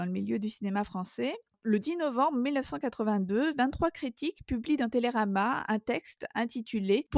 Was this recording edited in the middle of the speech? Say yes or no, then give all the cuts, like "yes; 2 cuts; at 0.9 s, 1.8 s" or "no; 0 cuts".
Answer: no; 0 cuts